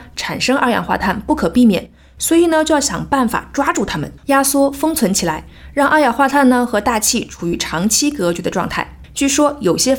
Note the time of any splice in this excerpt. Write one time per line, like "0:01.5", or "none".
0:04.2